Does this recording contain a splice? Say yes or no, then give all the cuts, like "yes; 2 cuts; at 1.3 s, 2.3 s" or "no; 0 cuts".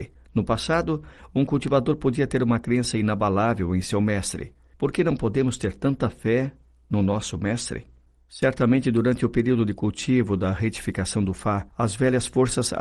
no; 0 cuts